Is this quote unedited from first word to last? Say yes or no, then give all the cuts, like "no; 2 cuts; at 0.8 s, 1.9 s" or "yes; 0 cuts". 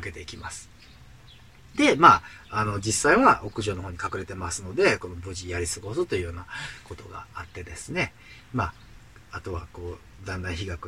yes; 0 cuts